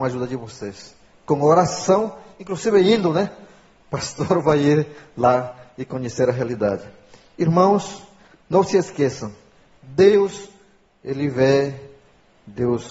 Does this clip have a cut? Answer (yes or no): no